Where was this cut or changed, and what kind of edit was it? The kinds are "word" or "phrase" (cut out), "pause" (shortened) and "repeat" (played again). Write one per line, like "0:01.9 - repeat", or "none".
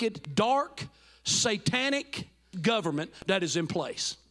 0:02.5 - word